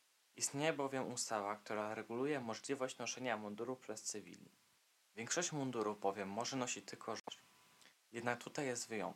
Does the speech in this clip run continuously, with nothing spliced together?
yes; 0 cuts

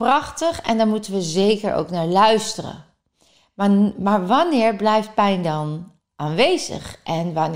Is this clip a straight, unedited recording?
yes; 0 cuts

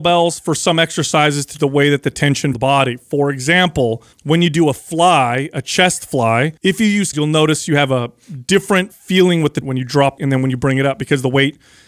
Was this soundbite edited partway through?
yes; 7 cuts; at 1.6 s, 2.5 s, 4.1 s, 6.6 s, 7.1 s, 9.6 s, 10.2 s

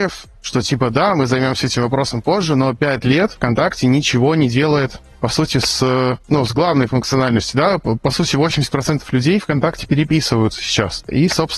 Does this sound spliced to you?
no; 0 cuts

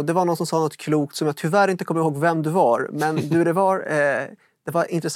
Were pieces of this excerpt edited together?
no; 0 cuts

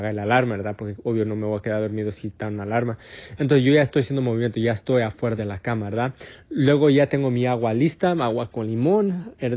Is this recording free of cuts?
yes; 0 cuts

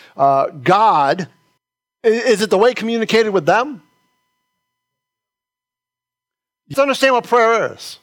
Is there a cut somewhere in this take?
yes; 3 cuts; at 1.6 s, 2.7 s, 6.7 s

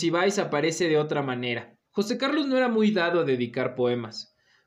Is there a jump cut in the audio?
yes; 1 cut; at 1.9 s

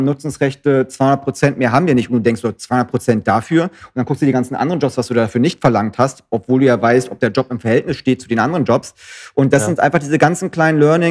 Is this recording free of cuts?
yes; 0 cuts

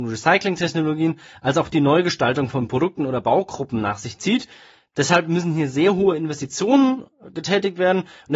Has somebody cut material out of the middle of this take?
no; 0 cuts

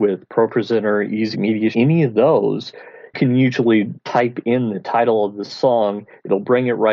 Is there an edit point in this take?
yes; 4 cuts; at 1.3 s, 1.7 s, 3.1 s, 4.0 s

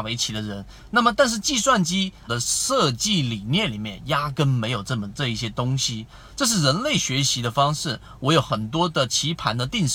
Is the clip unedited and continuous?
no; 1 cut; at 2.3 s

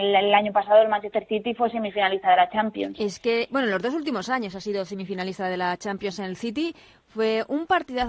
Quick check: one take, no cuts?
yes; 0 cuts

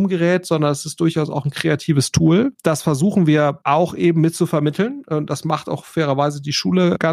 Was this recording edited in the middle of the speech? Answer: no; 0 cuts

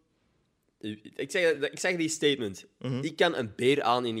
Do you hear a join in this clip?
no; 0 cuts

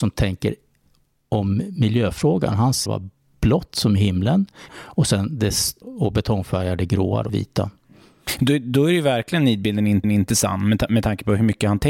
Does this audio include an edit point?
yes; 5 cuts; at 2.9 s, 4.7 s, 5.8 s, 7.3 s, 10.0 s

